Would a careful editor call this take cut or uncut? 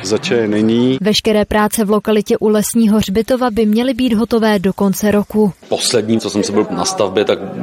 cut